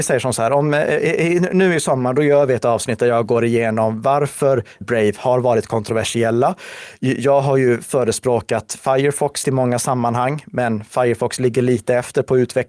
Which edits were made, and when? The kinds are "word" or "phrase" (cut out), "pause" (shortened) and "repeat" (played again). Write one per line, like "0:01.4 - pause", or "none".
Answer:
0:04.8 - word
0:09.4 - word